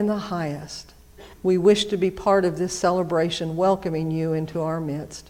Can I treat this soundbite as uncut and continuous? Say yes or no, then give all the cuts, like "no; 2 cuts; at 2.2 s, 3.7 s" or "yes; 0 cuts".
no; 1 cut; at 1.3 s